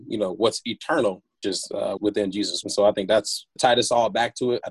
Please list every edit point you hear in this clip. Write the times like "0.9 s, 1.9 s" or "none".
1.4 s, 2.0 s, 2.6 s, 3.6 s